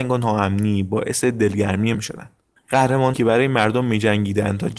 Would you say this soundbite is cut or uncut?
cut